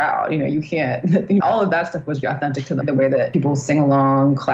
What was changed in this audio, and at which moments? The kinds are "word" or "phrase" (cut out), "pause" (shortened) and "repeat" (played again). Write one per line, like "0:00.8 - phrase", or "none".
0:01.4 - word
0:02.2 - word
0:02.8 - word